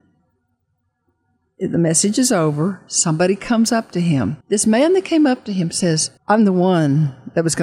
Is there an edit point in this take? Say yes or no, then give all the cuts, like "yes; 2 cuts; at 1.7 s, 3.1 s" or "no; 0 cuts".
yes; 2 cuts; at 4.4 s, 6.2 s